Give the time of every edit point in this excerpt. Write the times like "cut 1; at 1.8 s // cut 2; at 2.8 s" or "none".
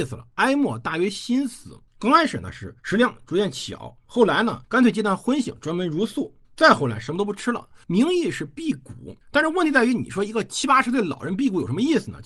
cut 1; at 1.9 s // cut 2; at 2.8 s // cut 3; at 4.6 s // cut 4; at 6.4 s // cut 5; at 7.8 s // cut 6; at 9.2 s